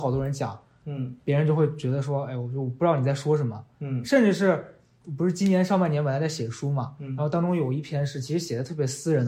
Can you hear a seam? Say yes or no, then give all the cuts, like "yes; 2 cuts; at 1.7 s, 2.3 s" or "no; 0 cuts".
no; 0 cuts